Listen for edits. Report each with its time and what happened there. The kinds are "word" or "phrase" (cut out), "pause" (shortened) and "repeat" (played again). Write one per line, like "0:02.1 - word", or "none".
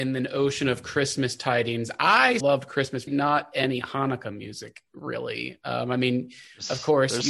0:02.4 - word
0:03.1 - phrase